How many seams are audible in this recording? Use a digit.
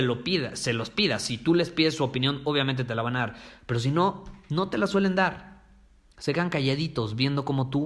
0